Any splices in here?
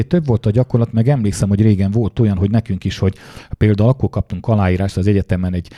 no; 0 cuts

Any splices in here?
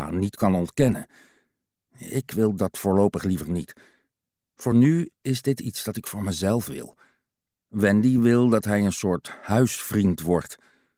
no; 0 cuts

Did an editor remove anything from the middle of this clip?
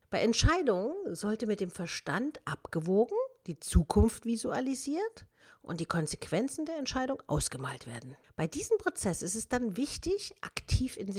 no; 0 cuts

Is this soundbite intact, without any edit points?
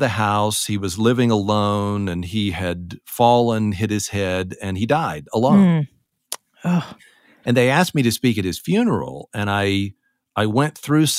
yes; 0 cuts

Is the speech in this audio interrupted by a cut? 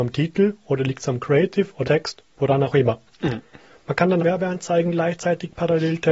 yes; 3 cuts; at 1.8 s, 2.3 s, 4.2 s

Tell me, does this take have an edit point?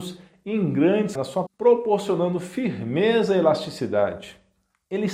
yes; 2 cuts; at 1.2 s, 1.5 s

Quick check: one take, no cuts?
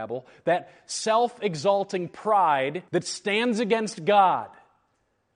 no; 1 cut; at 2.9 s

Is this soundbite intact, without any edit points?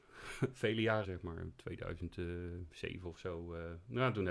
no; 1 cut; at 1.0 s

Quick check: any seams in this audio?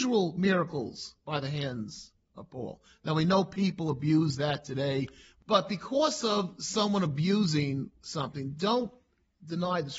no; 0 cuts

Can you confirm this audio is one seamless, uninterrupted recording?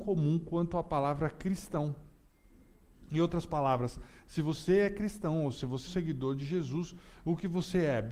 no; 1 cut; at 5.9 s

